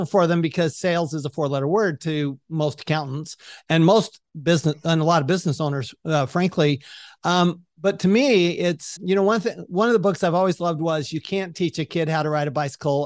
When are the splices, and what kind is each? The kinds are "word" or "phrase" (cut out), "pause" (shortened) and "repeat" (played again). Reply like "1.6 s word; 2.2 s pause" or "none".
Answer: 9.0 s word